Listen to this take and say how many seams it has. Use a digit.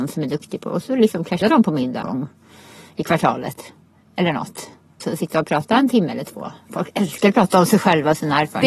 3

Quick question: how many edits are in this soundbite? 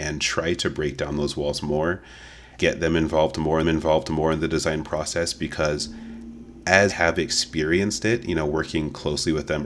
3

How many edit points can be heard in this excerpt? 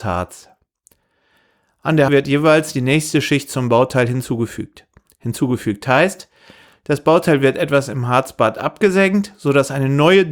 1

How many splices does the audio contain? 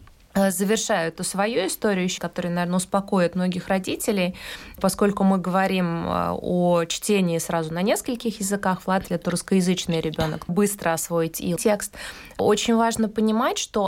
4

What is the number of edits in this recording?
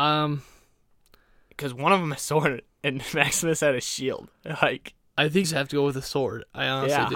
2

